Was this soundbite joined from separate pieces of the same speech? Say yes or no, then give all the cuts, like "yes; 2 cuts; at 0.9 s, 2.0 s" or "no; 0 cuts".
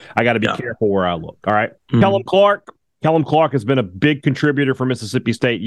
yes; 1 cut; at 1.8 s